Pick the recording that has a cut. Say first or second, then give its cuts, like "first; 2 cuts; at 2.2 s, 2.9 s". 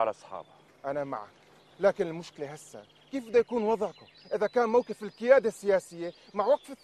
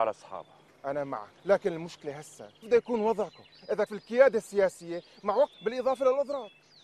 second; 4 cuts; at 1.4 s, 2.6 s, 3.9 s, 5.5 s